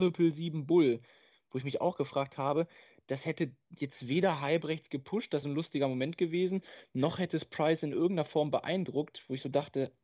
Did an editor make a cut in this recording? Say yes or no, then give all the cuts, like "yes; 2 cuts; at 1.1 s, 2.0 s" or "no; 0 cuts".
yes; 1 cut; at 5.4 s